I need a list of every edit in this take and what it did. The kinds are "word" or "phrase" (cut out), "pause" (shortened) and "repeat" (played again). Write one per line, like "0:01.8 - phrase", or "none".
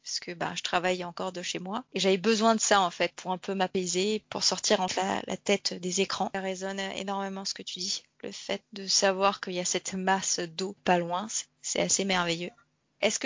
none